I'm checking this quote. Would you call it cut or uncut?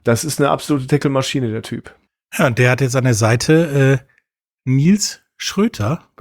cut